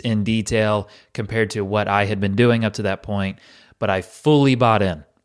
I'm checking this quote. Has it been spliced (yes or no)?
no